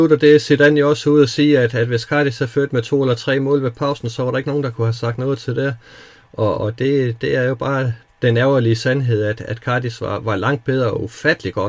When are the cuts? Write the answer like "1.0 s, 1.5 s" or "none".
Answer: none

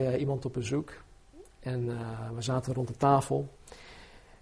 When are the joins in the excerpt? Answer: none

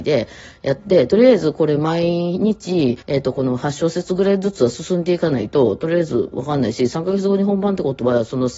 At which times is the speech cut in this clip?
3.0 s

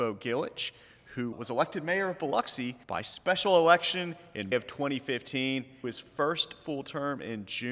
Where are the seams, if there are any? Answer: 1.3 s, 2.8 s, 4.5 s, 5.8 s

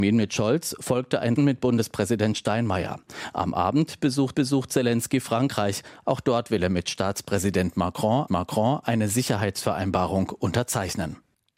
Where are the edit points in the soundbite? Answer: 1.4 s, 4.3 s, 8.3 s

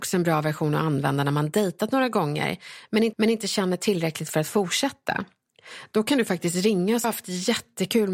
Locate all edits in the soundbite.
3.1 s, 7.0 s

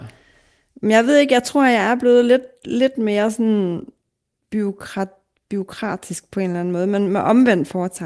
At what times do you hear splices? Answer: none

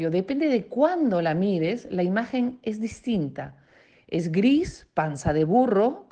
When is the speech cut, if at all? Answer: none

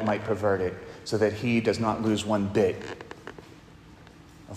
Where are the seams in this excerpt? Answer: none

